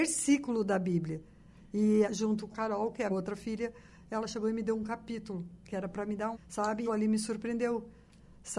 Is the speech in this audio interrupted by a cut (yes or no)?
yes